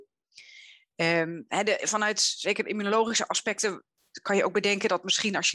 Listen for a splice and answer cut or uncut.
uncut